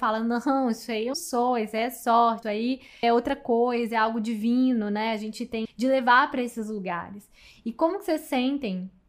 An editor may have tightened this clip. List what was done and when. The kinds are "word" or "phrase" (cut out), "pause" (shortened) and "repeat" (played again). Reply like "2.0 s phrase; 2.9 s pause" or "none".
1.1 s word; 2.4 s word; 3.0 s word; 5.6 s word

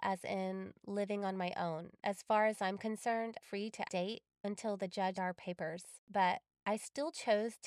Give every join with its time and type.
2.0 s pause; 3.4 s phrase; 3.9 s word; 5.1 s word; 6.0 s pause

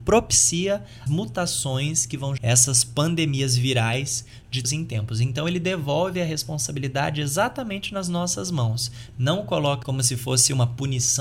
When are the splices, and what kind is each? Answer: 1.1 s word; 2.4 s word; 4.6 s word; 9.8 s word

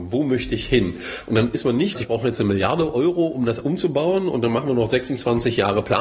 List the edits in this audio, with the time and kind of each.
1.9 s phrase; 3.6 s word

